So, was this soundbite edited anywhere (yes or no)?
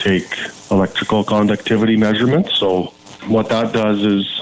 no